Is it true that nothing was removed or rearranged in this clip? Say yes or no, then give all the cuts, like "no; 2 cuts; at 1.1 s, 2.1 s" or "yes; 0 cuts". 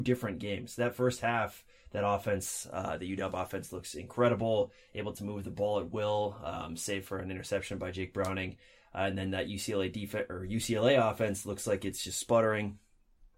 yes; 0 cuts